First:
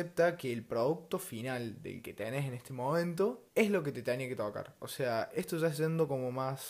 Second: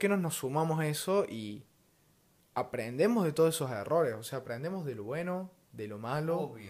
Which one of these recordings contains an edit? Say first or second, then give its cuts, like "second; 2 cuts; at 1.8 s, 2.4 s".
first; 1 cut; at 3.5 s